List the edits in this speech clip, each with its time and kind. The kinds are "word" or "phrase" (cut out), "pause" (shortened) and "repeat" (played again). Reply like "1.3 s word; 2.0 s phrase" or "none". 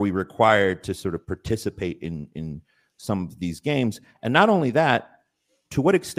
none